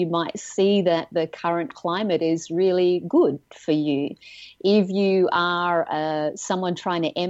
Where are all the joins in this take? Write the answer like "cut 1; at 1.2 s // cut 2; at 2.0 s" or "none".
none